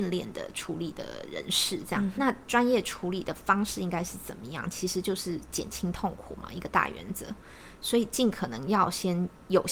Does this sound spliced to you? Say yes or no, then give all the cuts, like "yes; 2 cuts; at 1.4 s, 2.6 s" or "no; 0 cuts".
yes; 1 cut; at 2.2 s